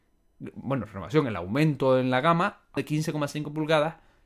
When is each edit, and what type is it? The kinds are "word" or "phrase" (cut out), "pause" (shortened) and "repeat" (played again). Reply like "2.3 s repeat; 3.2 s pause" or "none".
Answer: 2.8 s word